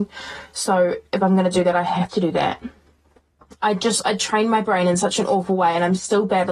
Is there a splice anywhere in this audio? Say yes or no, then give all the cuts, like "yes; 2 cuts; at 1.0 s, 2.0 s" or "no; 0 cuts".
no; 0 cuts